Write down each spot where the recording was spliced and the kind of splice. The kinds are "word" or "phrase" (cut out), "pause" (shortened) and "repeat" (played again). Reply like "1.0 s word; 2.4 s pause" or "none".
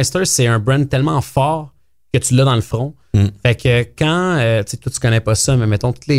none